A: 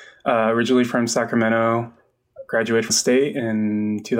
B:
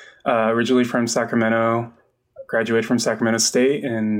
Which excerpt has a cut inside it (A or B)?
A